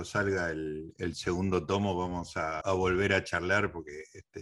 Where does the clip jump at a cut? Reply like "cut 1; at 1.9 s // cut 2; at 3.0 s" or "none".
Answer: cut 1; at 2.6 s